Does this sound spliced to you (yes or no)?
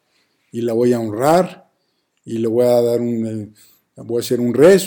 no